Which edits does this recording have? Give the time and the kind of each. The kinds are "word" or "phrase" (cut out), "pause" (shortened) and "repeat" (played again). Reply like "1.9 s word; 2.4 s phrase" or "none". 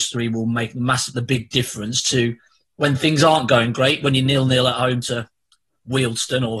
none